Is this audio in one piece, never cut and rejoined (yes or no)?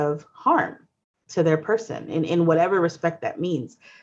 yes